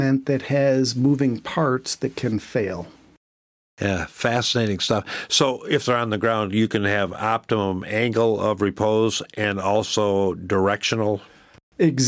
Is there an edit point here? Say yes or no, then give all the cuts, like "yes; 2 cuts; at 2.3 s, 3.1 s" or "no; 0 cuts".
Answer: no; 0 cuts